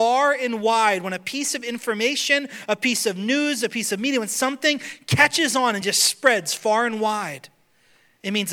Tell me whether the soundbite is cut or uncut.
uncut